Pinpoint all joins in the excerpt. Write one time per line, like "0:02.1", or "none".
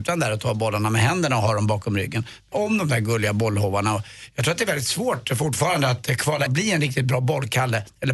0:02.5
0:06.5